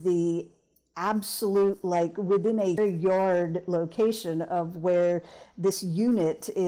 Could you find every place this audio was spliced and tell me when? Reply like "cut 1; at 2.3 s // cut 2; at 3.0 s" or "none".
cut 1; at 2.8 s